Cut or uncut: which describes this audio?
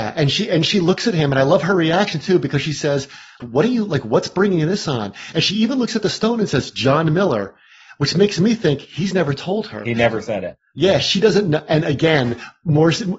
cut